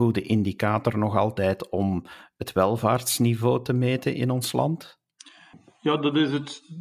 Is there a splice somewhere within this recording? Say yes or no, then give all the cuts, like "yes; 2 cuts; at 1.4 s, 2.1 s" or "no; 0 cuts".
no; 0 cuts